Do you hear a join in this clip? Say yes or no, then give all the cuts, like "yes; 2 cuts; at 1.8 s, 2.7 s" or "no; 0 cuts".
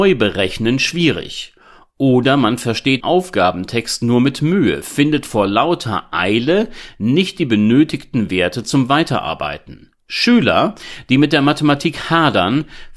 yes; 1 cut; at 3.0 s